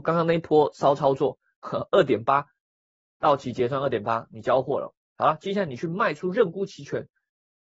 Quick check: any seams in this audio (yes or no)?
no